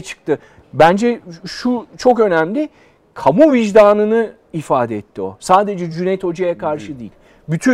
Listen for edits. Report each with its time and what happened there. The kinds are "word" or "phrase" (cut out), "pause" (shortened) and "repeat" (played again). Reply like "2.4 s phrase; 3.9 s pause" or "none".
none